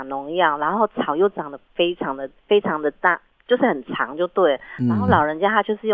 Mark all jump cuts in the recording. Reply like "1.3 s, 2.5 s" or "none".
2.4 s